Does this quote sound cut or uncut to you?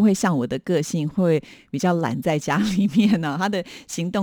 uncut